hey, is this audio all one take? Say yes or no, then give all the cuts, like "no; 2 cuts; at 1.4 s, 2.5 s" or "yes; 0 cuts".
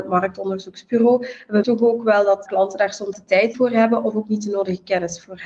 no; 4 cuts; at 1.6 s, 2.5 s, 3.1 s, 3.5 s